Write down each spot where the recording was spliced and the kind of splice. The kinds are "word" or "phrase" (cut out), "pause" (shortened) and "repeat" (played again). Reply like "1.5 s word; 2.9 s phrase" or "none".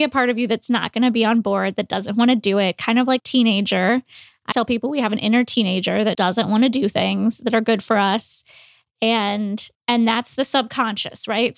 3.2 s word; 4.5 s word; 6.1 s word; 9.7 s pause

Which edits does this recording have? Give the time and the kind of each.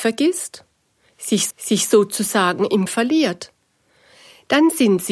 1.5 s repeat; 2.9 s word

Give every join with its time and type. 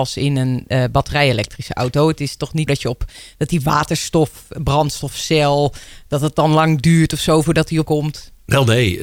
2.7 s word; 7.8 s word

